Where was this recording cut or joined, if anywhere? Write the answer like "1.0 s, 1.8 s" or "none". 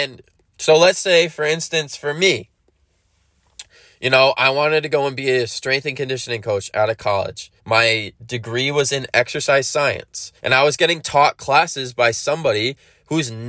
7.6 s, 10.4 s